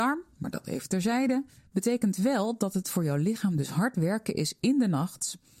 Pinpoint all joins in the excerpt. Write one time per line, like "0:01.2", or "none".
0:01.6